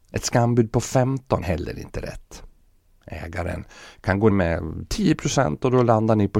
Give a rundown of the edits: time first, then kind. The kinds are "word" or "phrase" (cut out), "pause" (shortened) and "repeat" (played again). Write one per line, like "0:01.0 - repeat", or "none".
0:01.4 - word
0:04.3 - word